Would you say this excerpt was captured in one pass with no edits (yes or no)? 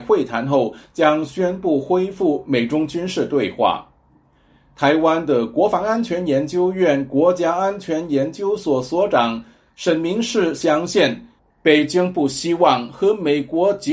yes